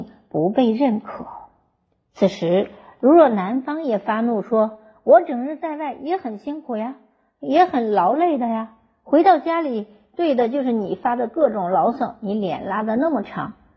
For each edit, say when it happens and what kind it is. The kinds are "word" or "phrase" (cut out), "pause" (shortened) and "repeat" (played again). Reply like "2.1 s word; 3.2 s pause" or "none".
none